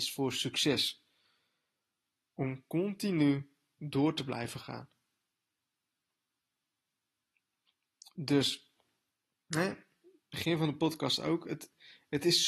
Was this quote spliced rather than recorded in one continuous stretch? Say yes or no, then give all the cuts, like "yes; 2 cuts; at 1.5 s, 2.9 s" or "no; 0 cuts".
no; 0 cuts